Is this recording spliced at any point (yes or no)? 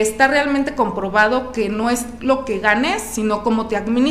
no